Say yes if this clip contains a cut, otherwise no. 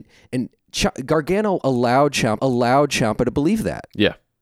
yes